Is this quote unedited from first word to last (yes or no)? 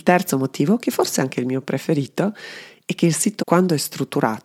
no